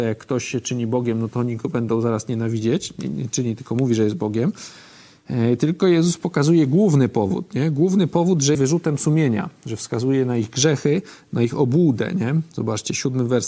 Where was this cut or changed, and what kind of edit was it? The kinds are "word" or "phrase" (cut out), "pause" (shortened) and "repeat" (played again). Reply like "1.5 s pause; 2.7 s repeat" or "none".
8.5 s word